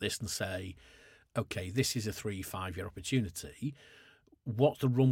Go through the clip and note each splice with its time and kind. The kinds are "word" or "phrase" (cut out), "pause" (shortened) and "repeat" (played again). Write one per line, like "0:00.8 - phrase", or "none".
none